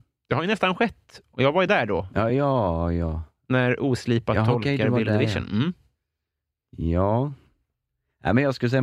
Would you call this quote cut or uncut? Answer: uncut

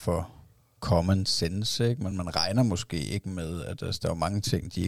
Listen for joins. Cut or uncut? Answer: uncut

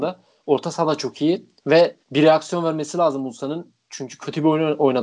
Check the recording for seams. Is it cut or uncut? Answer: cut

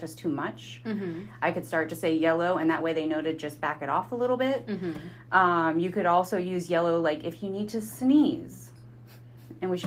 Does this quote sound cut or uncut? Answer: uncut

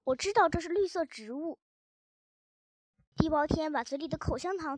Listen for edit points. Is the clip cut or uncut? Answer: uncut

